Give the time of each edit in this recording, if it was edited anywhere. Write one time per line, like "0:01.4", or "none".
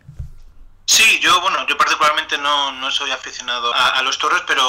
0:03.7